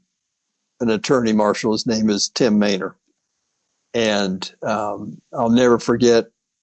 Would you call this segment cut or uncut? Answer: uncut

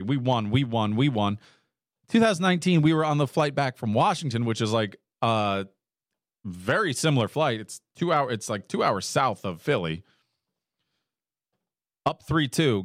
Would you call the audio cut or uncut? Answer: uncut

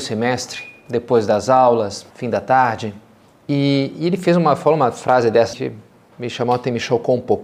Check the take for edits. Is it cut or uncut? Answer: cut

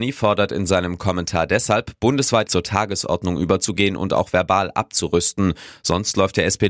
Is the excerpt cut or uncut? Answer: cut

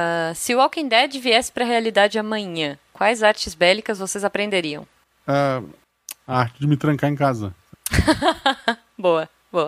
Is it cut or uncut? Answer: uncut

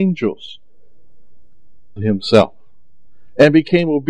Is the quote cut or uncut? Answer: cut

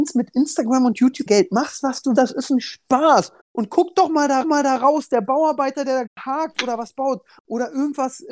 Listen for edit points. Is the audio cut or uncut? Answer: cut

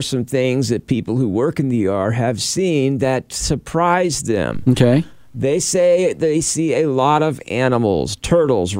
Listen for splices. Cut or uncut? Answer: uncut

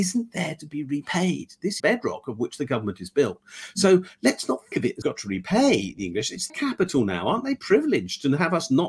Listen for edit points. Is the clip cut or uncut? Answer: cut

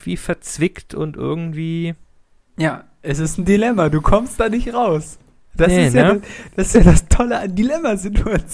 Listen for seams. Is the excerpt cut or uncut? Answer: uncut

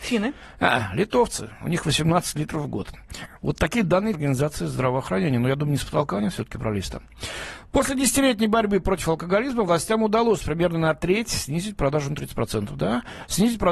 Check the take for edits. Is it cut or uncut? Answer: cut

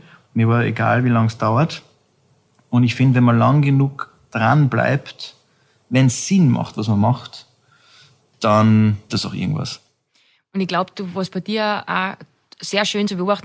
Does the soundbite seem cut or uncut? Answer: cut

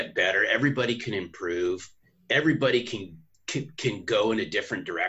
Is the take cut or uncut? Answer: uncut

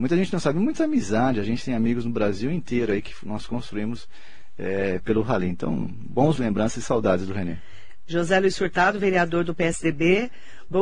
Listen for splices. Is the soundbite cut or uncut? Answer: cut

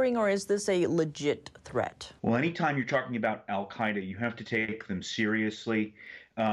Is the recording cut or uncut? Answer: cut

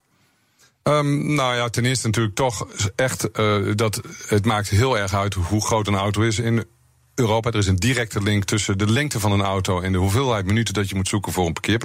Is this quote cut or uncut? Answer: uncut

